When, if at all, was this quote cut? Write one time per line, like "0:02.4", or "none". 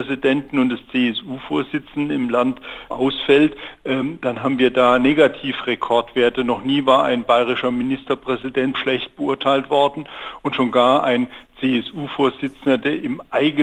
0:02.9
0:08.7